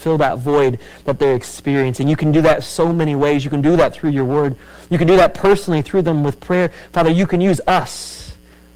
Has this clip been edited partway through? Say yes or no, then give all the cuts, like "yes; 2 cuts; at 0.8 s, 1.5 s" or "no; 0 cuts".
no; 0 cuts